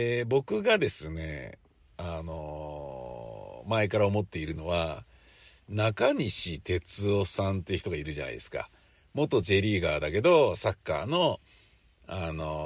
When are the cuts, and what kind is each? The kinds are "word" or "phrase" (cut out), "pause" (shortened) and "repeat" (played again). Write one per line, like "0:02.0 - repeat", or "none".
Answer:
none

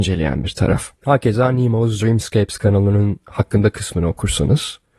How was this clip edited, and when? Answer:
0:01.0 - pause

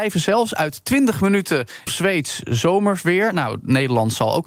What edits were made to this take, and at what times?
0:01.9 - phrase

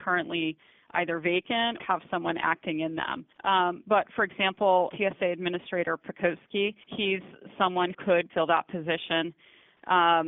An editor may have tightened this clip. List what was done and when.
0:01.8 - word
0:03.3 - pause
0:04.9 - word
0:06.8 - pause
0:07.9 - word
0:08.3 - word

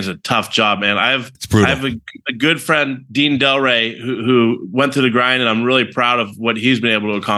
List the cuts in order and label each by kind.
0:01.3 - pause

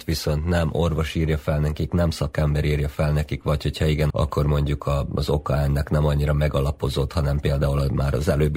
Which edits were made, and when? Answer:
0:04.1 - word

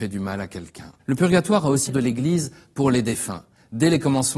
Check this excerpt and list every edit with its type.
0:01.0 - pause
0:01.9 - phrase

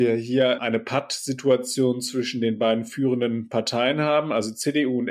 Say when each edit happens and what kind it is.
none

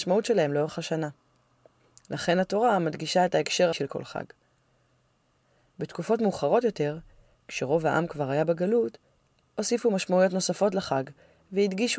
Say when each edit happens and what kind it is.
0:03.7 - word

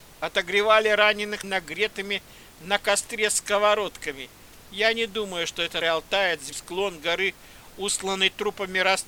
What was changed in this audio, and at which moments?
0:01.4 - word
0:05.8 - word
0:06.5 - word

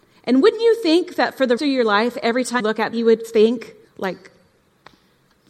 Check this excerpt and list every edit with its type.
0:01.6 - word
0:02.6 - word
0:02.9 - word
0:03.8 - pause

